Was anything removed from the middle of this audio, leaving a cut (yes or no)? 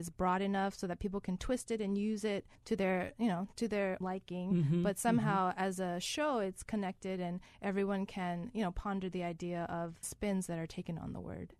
yes